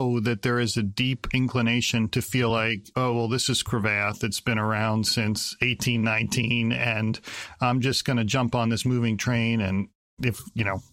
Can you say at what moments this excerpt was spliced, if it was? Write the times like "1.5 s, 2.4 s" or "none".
none